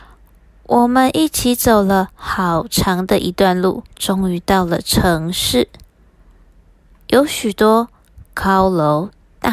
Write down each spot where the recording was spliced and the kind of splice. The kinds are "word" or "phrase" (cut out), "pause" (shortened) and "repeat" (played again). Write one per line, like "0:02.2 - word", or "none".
0:03.9 - pause